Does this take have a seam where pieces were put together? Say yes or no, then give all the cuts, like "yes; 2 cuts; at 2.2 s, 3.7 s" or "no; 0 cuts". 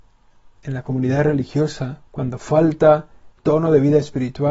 yes; 2 cuts; at 2.1 s, 3.4 s